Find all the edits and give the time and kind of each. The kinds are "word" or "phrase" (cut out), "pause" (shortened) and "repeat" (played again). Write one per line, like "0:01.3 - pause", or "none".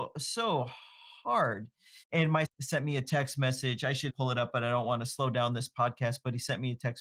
0:02.0 - pause
0:02.4 - phrase
0:04.1 - word